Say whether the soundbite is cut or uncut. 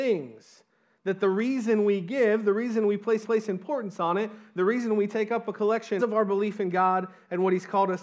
cut